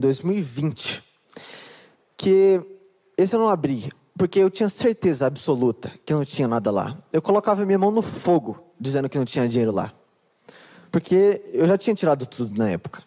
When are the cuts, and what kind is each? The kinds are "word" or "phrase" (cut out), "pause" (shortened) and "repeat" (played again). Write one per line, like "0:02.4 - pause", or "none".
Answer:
none